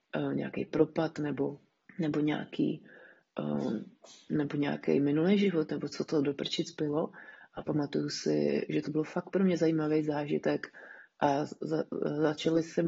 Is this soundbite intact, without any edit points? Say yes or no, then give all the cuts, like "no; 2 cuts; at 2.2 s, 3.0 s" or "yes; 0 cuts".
no; 2 cuts; at 1.8 s, 3.3 s